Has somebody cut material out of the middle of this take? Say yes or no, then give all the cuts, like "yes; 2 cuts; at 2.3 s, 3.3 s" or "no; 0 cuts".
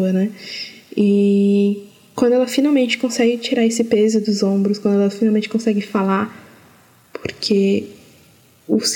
no; 0 cuts